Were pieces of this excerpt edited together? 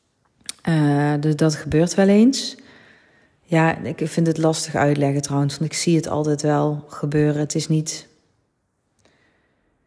no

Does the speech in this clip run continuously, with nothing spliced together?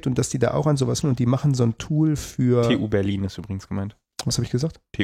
no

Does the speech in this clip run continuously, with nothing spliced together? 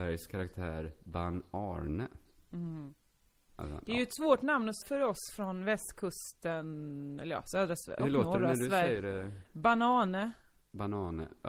no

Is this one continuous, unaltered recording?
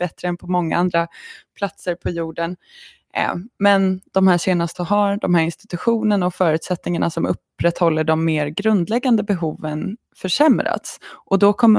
no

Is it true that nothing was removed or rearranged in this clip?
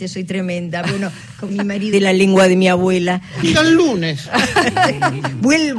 no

